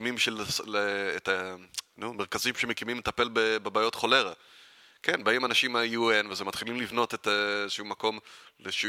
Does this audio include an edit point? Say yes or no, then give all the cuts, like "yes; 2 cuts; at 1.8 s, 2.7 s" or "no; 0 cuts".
no; 0 cuts